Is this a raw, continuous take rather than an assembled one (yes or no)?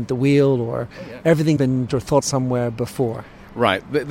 no